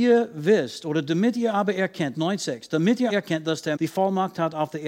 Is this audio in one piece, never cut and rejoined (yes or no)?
no